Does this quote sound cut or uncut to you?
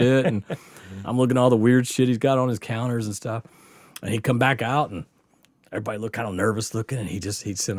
uncut